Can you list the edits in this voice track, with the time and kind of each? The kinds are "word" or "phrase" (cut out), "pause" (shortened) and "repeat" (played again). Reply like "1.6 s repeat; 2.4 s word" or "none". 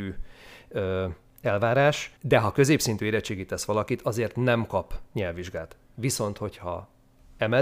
2.2 s pause